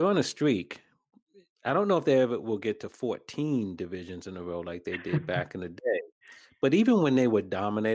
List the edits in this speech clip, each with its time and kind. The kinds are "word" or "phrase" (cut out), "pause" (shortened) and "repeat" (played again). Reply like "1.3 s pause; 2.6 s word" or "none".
none